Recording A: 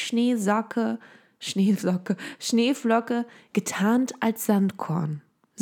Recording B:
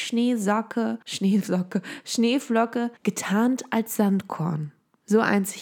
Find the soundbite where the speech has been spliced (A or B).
B